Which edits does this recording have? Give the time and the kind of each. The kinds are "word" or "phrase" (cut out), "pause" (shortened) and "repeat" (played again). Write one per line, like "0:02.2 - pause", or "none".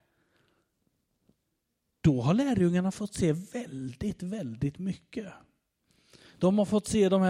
none